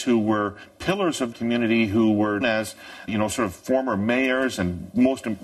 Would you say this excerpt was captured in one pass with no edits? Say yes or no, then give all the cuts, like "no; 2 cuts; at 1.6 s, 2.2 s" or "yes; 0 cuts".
no; 3 cuts; at 1.3 s, 2.4 s, 3.1 s